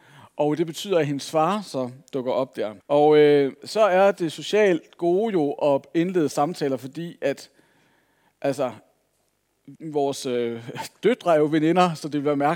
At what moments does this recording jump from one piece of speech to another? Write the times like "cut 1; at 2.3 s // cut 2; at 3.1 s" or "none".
cut 1; at 2.8 s // cut 2; at 9.8 s